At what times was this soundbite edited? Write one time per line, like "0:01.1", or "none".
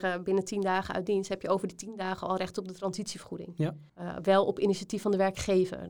0:03.9